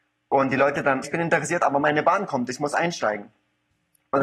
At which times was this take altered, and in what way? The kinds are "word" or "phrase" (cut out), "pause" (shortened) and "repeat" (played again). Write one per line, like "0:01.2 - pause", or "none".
0:01.0 - word